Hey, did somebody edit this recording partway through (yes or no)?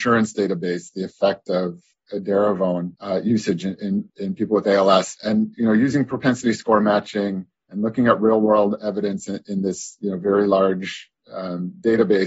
yes